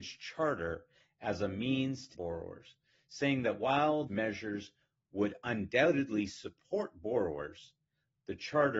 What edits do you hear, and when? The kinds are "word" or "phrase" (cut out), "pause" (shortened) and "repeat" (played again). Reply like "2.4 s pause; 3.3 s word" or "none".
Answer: 2.1 s phrase; 4.1 s phrase

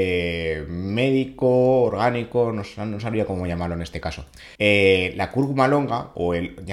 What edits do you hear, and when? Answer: 4.6 s pause

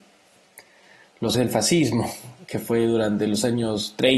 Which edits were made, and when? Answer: 1.3 s word

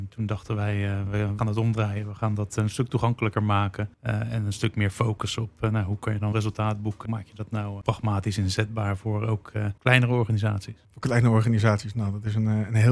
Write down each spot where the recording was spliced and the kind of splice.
1.4 s phrase; 3.9 s pause; 6.3 s word; 7.0 s phrase; 7.8 s word; 9.8 s pause

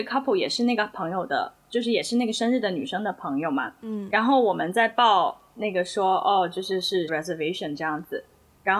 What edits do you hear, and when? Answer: 7.1 s phrase

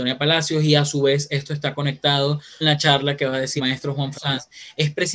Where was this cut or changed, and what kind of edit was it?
2.6 s word; 3.6 s word; 4.1 s word

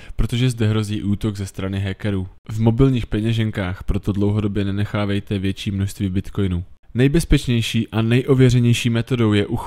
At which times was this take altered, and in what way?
2.4 s pause; 6.8 s pause

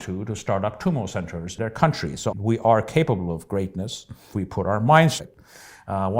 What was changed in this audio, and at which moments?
1.6 s word; 2.3 s word; 4.3 s word; 5.2 s word

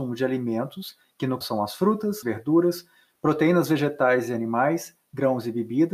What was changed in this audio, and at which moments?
1.4 s word; 2.2 s word

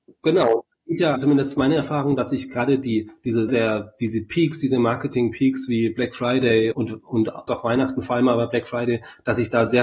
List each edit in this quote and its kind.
1.2 s word; 3.5 s word; 6.7 s word; 7.5 s word

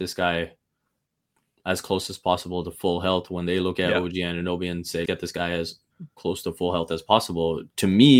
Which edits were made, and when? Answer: 5.1 s word

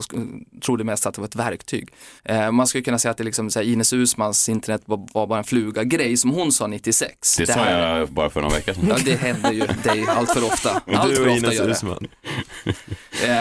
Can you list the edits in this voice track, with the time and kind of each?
2.2 s pause

